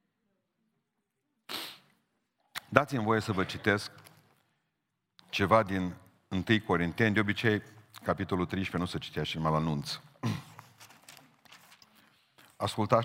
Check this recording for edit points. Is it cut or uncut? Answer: uncut